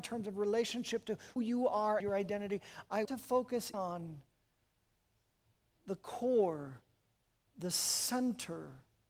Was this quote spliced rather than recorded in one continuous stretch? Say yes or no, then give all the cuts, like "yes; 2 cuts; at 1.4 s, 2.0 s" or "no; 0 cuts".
yes; 4 cuts; at 1.4 s, 2.0 s, 3.0 s, 3.7 s